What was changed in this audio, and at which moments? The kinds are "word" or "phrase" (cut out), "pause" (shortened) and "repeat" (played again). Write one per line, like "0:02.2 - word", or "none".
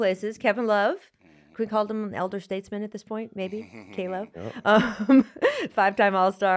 0:01.5 - word